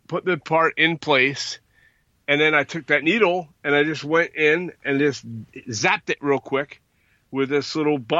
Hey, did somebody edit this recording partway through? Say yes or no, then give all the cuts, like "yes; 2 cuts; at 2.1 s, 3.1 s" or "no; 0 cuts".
no; 0 cuts